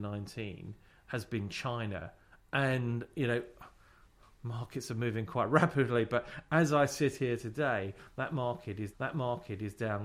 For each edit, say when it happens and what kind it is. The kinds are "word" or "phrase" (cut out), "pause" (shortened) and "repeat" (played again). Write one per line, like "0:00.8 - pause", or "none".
0:08.9 - repeat